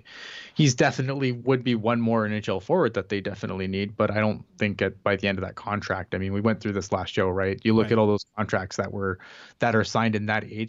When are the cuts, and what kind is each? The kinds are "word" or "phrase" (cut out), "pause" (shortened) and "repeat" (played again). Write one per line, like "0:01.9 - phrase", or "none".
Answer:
none